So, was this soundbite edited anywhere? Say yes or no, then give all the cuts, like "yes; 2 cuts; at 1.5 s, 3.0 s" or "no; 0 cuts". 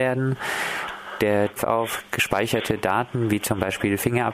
yes; 1 cut; at 1.6 s